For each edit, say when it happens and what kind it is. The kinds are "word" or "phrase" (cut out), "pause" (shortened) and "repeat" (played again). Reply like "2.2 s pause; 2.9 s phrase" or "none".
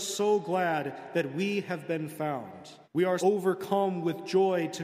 2.8 s pause; 3.2 s word

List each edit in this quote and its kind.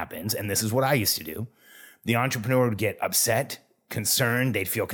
none

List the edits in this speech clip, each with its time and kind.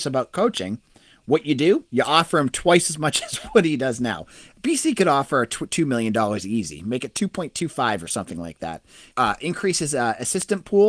1.9 s pause; 9.1 s pause

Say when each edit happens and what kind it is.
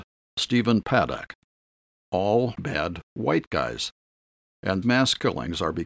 2.6 s word; 4.8 s word

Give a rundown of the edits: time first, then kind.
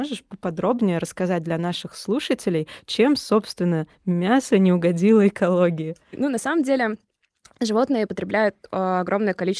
8.1 s word

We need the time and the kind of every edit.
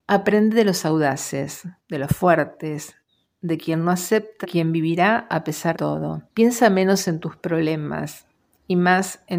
1.8 s pause; 4.4 s phrase; 5.7 s word; 6.3 s pause

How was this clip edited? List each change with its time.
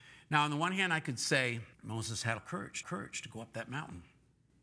1.7 s pause; 2.4 s phrase; 2.8 s repeat

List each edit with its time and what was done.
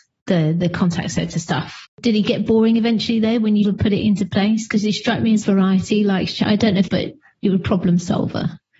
1.9 s pause; 2.5 s word; 3.6 s word; 5.4 s phrase; 6.9 s phrase

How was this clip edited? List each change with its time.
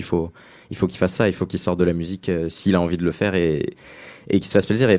none

